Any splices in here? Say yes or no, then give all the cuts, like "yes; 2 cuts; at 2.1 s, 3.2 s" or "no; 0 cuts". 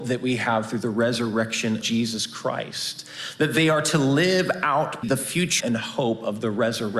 yes; 3 cuts; at 1.8 s, 5.0 s, 5.6 s